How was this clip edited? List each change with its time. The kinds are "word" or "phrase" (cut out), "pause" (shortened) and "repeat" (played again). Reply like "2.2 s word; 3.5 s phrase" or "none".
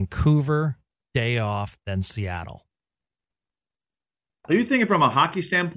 none

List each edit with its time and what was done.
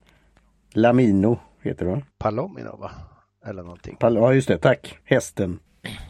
2.1 s pause; 5.0 s pause

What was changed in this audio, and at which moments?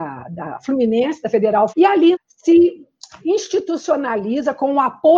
1.7 s word; 2.1 s word

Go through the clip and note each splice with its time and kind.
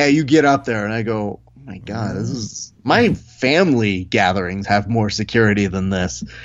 none

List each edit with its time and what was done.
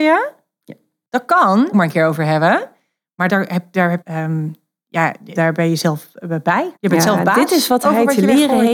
1.7 s phrase; 3.3 s word; 4.0 s phrase; 5.4 s word; 6.8 s pause

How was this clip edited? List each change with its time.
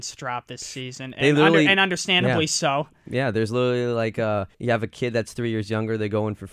4.5 s pause

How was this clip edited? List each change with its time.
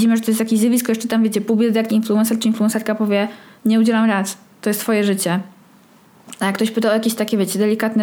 1.9 s word; 3.6 s word

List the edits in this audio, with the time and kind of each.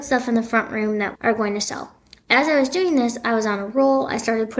1.1 s word

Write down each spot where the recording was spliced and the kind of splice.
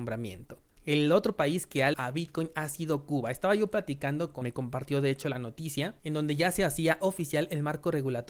1.9 s word; 4.4 s phrase; 6.0 s pause

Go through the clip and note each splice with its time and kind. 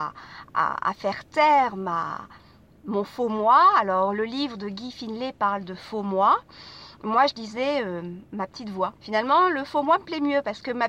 9.0 s pause

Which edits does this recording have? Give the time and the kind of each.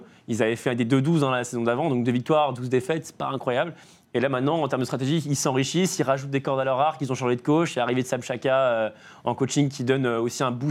none

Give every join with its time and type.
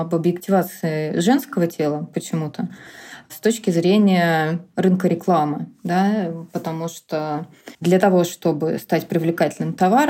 7.7 s pause

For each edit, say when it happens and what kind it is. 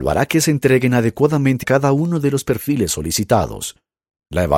1.6 s word

